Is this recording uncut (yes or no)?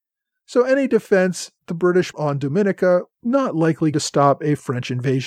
no